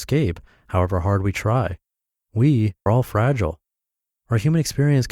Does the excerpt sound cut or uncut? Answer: cut